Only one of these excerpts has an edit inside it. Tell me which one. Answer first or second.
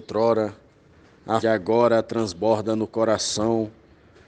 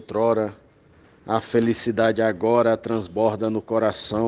first